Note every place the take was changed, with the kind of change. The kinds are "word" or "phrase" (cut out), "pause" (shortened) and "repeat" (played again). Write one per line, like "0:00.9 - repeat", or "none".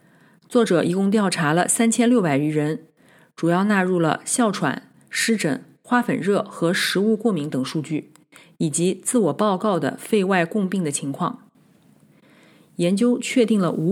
none

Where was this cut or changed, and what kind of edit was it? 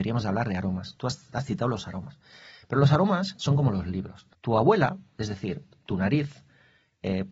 0:04.3 - pause

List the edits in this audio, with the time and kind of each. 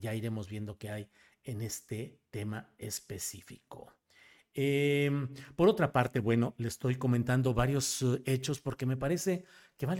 none

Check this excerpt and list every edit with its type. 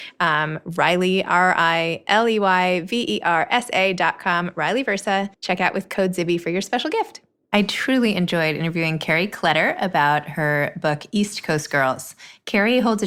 0:05.3 - pause

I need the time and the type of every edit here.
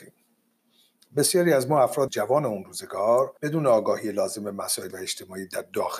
0:02.1 - word
0:03.4 - pause
0:04.9 - word

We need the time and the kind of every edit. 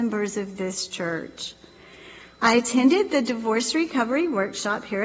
none

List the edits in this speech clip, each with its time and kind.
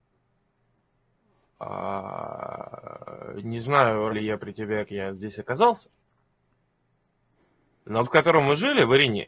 0:04.1 - word
0:04.8 - word
0:08.0 - word

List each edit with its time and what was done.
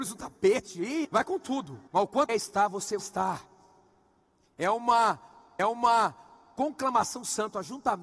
0:01.0 - word
0:01.9 - pause
0:02.3 - phrase
0:03.0 - word
0:05.6 - repeat

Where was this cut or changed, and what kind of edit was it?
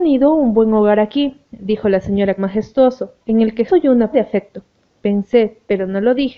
0:02.4 - phrase
0:03.2 - pause
0:03.7 - word
0:04.1 - word

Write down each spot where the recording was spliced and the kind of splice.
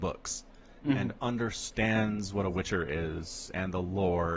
none

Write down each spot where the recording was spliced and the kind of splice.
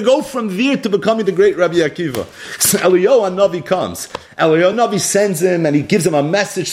none

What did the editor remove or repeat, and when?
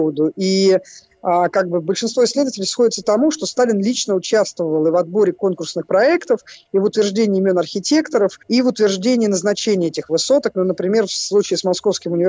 0:08.4 - pause

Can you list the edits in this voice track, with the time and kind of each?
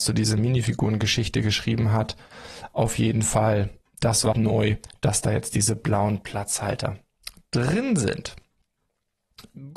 0:04.3 - word

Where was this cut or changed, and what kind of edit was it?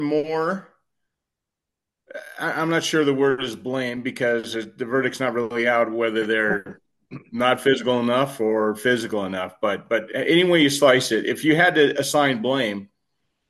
none

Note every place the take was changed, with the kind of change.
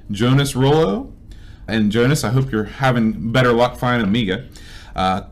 0:01.7 - word
0:04.0 - word

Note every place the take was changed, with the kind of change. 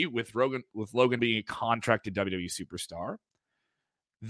0:01.2 - word

